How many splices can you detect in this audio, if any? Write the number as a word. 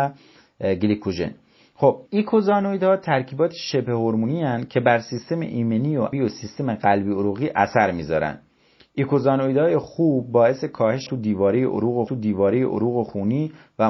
four